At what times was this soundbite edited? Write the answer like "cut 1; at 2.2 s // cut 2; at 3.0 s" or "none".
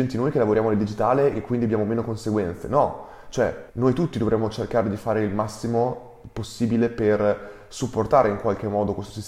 cut 1; at 3.7 s